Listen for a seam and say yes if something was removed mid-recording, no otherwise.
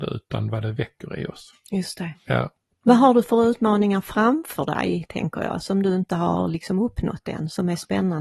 no